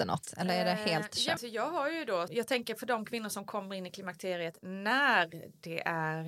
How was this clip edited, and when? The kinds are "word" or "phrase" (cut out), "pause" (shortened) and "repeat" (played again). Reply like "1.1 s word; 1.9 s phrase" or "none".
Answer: 1.4 s phrase; 2.3 s phrase